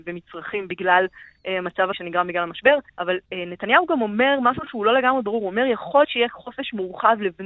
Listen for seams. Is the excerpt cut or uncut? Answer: cut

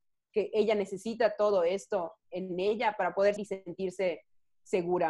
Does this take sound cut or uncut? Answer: cut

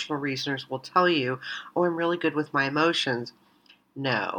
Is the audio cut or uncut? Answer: uncut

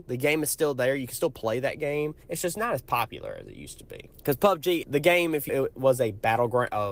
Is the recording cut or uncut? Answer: cut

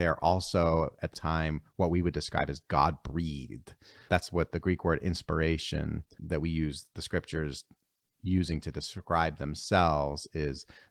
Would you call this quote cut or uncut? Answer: cut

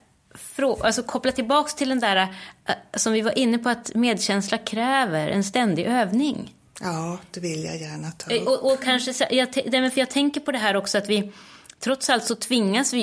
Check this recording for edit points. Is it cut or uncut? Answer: uncut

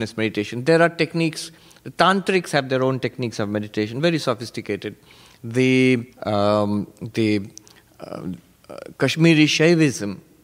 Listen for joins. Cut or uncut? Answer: cut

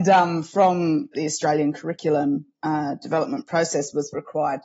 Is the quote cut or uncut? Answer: cut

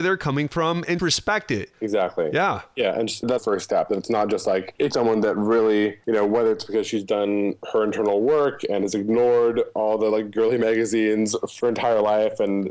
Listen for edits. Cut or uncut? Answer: cut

